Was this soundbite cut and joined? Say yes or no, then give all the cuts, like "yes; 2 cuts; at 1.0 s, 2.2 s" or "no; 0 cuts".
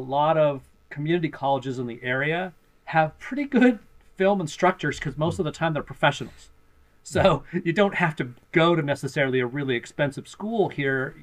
no; 0 cuts